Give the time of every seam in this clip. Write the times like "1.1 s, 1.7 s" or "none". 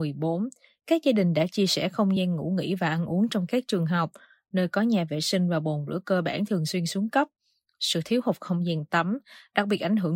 none